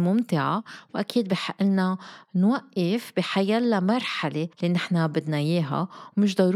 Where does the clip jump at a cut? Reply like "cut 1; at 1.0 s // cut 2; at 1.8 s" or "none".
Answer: cut 1; at 4.5 s